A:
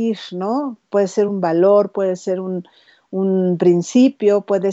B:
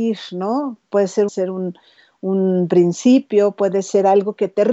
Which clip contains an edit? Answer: B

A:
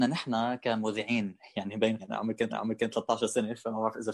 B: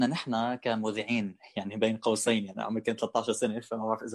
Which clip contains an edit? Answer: A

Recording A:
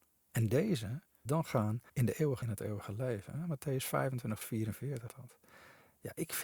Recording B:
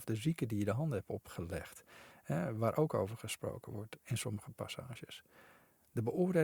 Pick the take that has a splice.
A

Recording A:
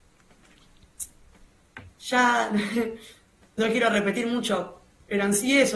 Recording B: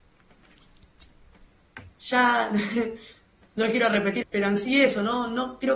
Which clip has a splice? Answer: B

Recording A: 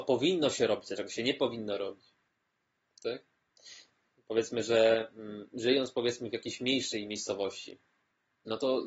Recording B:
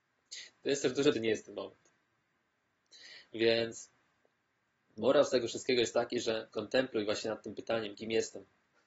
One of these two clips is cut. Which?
B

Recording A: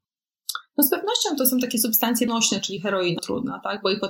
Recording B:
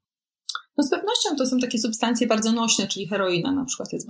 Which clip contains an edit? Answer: A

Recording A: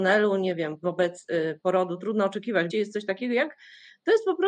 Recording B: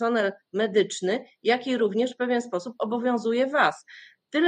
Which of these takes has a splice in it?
A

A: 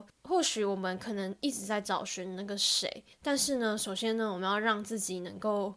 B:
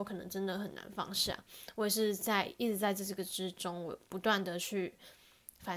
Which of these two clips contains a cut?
A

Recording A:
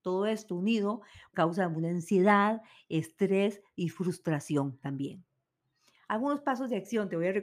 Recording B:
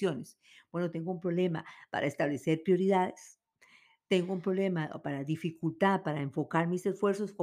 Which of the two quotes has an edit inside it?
A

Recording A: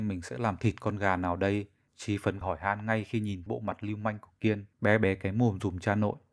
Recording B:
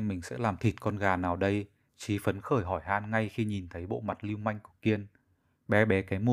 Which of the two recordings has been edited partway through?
A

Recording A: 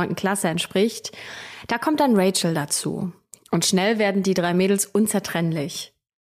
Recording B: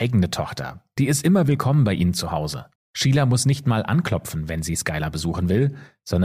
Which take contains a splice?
B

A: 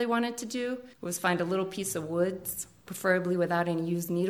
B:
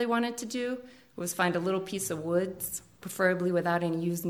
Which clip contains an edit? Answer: A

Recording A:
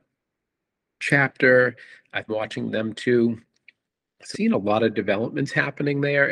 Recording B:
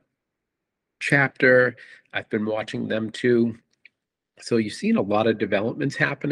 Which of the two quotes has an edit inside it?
A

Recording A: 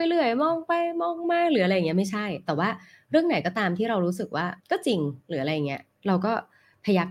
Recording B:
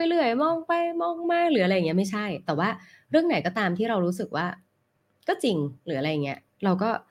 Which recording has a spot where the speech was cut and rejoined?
A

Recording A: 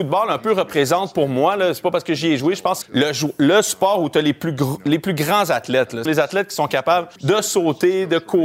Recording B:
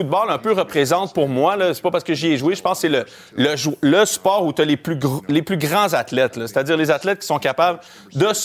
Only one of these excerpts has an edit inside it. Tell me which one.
A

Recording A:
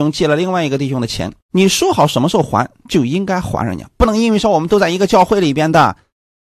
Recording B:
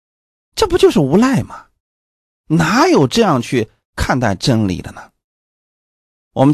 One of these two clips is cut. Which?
A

